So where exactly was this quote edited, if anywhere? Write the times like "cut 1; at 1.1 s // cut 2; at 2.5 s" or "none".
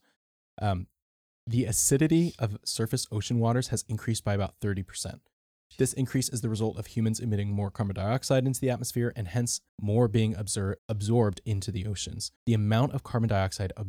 cut 1; at 9.7 s // cut 2; at 10.8 s // cut 3; at 12.4 s